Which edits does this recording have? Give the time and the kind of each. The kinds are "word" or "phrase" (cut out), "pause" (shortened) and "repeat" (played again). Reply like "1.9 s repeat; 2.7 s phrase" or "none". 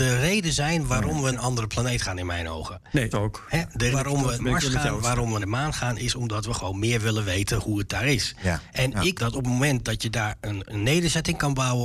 1.3 s word; 3.1 s word; 3.9 s word; 4.4 s word; 5.0 s word; 5.4 s word; 9.1 s word; 10.7 s word